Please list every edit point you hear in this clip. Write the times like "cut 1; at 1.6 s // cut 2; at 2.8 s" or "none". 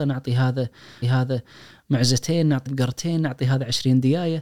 cut 1; at 1.0 s // cut 2; at 2.7 s